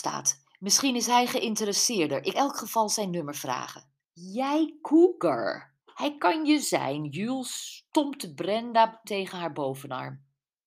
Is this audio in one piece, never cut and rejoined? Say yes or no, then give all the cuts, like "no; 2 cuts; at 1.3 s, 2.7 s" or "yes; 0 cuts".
no; 6 cuts; at 2.3 s, 4.0 s, 5.8 s, 6.6 s, 7.9 s, 9.0 s